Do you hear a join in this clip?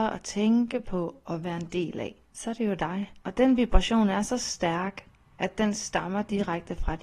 yes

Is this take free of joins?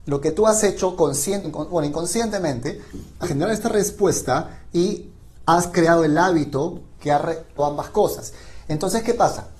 no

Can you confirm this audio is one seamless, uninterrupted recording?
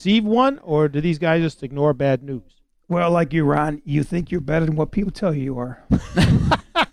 yes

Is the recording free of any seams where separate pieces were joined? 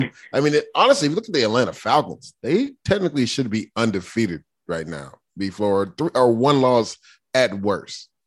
yes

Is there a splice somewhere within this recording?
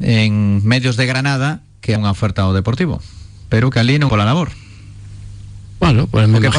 yes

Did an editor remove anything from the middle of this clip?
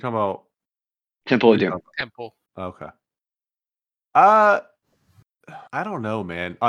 yes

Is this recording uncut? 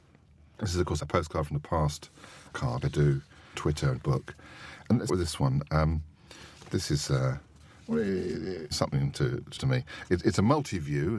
no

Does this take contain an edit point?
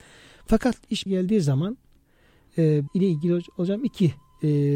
yes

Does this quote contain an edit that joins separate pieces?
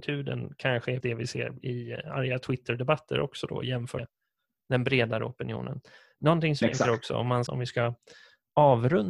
yes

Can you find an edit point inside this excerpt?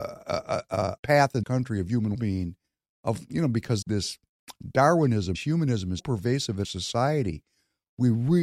yes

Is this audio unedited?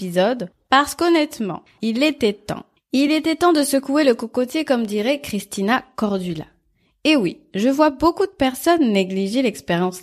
yes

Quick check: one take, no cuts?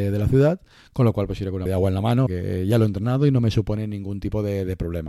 no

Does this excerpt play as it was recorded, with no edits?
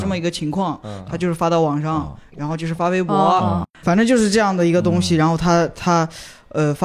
no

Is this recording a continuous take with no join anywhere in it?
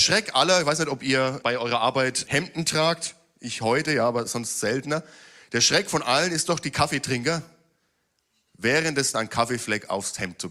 no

